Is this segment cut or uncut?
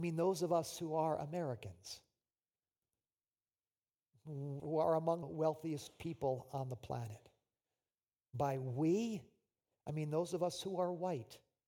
cut